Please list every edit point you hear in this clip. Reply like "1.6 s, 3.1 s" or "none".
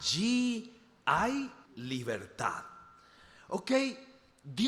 1.7 s